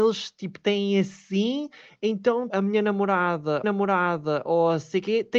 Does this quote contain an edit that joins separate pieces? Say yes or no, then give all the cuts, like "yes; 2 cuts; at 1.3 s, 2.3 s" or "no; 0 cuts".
yes; 2 cuts; at 2.5 s, 3.6 s